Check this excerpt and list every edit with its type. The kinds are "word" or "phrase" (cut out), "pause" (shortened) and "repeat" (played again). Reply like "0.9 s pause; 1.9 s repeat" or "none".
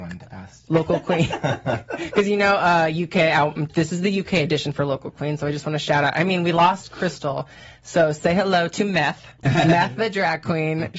none